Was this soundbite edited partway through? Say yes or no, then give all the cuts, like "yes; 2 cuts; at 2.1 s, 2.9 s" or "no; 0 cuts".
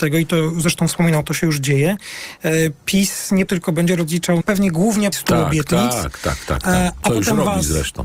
yes; 4 cuts; at 1.2 s, 3.5 s, 4.4 s, 5.1 s